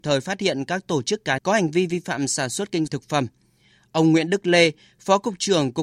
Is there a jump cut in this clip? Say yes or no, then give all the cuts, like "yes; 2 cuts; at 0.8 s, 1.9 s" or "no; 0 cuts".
yes; 2 cuts; at 1.4 s, 2.9 s